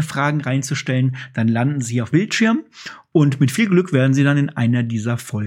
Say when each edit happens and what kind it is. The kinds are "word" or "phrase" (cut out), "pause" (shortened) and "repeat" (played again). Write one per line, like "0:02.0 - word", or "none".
0:02.1 - word